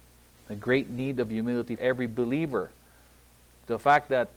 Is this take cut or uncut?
cut